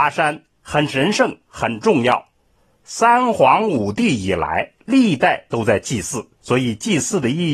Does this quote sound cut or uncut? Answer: uncut